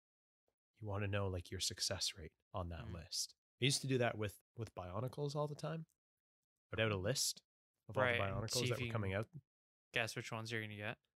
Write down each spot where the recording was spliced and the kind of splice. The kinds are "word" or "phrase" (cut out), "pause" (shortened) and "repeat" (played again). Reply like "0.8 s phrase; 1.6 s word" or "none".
2.4 s pause; 4.4 s word; 6.8 s word